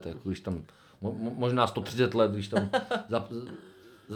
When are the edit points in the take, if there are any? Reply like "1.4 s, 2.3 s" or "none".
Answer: none